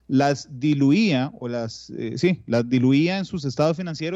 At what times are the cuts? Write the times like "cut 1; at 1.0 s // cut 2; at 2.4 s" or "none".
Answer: none